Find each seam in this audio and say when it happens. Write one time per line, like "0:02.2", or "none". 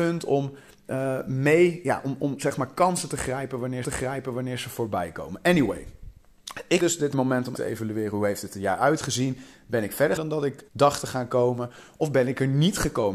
0:03.8
0:06.8
0:07.1
0:07.5
0:10.2
0:10.7